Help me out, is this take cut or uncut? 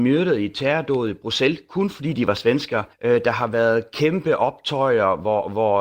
cut